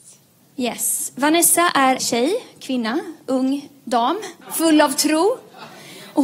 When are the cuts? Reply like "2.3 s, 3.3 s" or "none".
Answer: 2.0 s, 4.4 s